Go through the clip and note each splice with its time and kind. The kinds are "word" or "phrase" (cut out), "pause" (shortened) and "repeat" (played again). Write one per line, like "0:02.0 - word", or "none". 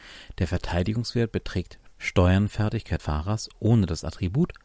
0:03.0 - word